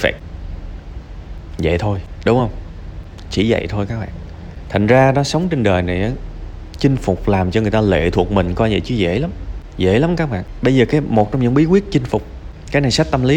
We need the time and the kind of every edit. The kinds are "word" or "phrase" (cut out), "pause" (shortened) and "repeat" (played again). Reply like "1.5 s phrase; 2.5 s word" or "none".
none

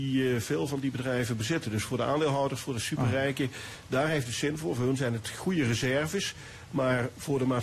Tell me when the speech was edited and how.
none

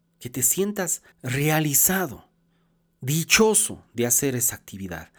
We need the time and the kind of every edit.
1.1 s pause

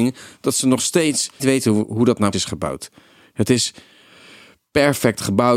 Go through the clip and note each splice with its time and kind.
1.4 s word; 2.3 s word

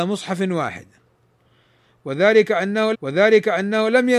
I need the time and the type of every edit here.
2.9 s repeat

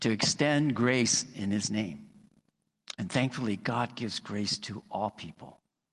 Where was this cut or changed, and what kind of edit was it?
none

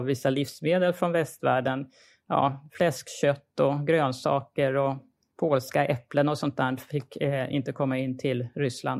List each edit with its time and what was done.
none

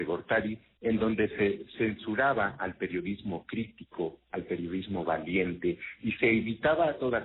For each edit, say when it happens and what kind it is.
none

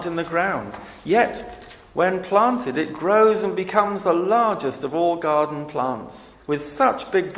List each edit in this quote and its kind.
6.4 s pause

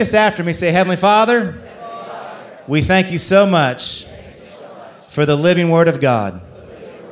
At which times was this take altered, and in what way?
none

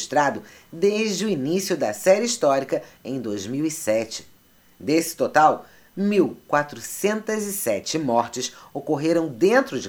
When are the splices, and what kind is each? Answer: none

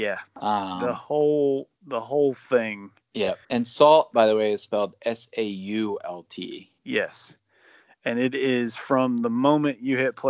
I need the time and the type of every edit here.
3.4 s pause; 6.8 s pause

